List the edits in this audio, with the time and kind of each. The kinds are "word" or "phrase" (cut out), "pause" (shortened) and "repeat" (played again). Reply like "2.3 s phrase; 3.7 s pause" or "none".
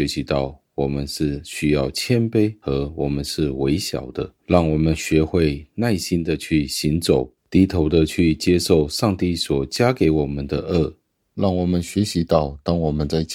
4.4 s pause; 7.4 s pause